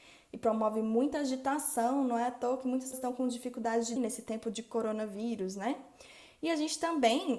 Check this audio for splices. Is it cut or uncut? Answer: cut